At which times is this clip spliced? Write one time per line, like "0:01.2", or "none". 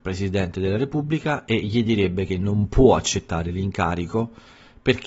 none